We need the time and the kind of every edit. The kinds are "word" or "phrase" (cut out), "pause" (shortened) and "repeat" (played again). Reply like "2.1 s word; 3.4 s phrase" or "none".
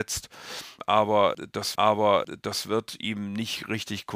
1.7 s repeat